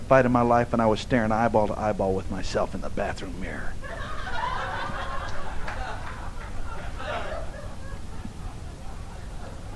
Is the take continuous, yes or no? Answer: yes